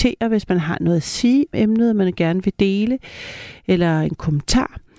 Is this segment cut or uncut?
cut